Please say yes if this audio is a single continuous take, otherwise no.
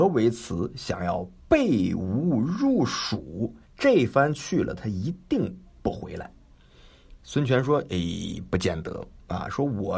no